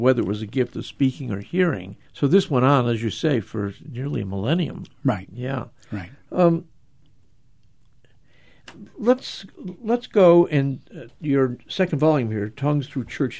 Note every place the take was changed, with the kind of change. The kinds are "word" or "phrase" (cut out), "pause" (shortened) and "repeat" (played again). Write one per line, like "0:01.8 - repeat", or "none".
0:02.1 - pause
0:11.1 - phrase